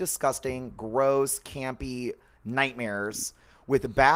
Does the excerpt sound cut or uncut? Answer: uncut